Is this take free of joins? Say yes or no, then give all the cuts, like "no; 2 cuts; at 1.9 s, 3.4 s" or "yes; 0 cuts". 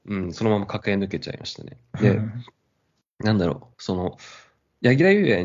no; 1 cut; at 3.7 s